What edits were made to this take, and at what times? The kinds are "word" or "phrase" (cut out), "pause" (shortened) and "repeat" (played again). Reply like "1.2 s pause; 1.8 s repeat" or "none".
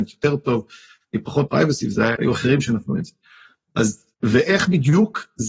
1.5 s phrase; 2.1 s word; 4.1 s pause